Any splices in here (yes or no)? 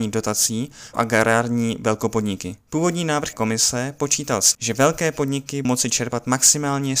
yes